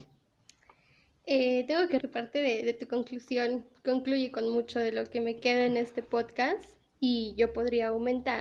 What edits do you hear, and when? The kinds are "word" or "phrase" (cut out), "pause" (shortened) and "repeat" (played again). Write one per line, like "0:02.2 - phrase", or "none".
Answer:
0:02.0 - word